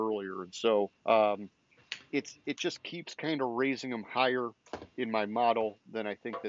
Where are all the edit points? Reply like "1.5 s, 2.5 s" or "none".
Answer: 1.0 s